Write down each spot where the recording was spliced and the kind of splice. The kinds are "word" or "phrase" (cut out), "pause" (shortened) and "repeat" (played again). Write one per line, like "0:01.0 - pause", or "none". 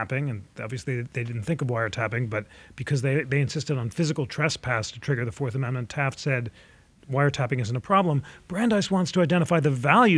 none